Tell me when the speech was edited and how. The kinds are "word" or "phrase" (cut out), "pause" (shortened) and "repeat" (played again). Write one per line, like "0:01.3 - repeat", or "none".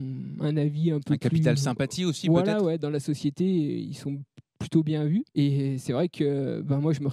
0:05.3 - pause